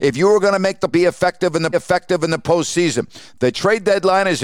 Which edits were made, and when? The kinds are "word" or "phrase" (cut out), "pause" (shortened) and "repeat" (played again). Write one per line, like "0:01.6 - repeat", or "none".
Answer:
0:00.9 - phrase
0:01.7 - repeat